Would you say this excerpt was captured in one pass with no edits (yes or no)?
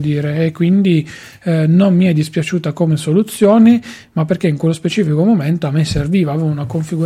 yes